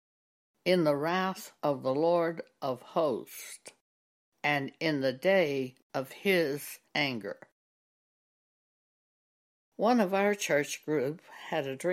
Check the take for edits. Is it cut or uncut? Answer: cut